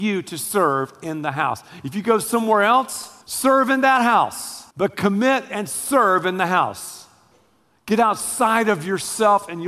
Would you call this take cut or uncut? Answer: cut